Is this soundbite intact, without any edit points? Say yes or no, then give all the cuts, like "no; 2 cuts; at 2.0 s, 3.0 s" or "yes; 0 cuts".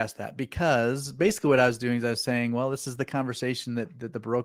yes; 0 cuts